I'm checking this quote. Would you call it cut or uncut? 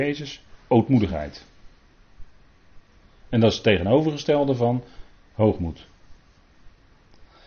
uncut